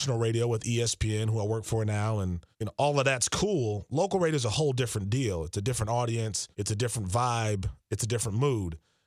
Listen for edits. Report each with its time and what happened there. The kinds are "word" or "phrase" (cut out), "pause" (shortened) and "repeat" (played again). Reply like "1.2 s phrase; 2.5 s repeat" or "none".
2.5 s pause; 6.5 s pause